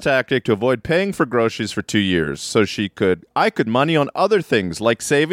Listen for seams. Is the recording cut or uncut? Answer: cut